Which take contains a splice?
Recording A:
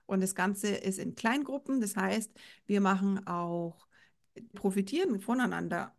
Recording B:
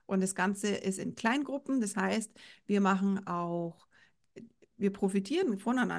A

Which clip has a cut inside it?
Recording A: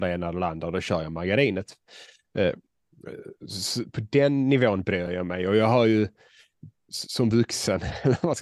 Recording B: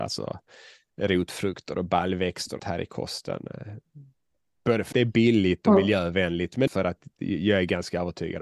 B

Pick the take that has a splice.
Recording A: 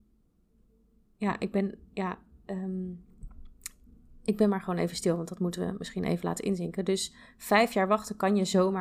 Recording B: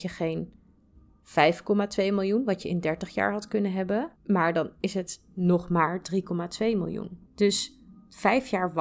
B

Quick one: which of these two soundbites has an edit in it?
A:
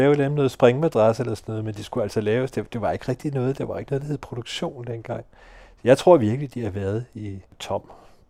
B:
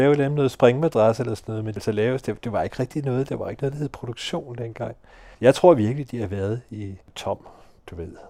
B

